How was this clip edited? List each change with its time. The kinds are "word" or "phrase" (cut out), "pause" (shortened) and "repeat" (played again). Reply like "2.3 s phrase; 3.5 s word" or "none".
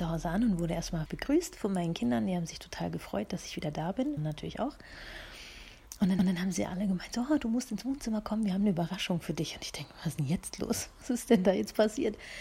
1.1 s phrase; 4.2 s phrase; 6.2 s repeat